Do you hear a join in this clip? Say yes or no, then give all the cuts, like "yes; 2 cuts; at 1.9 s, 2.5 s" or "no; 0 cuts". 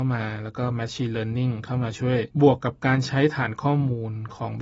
yes; 1 cut; at 2.3 s